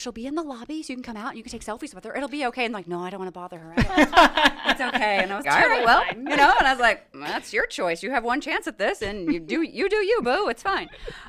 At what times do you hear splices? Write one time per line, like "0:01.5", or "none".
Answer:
0:05.4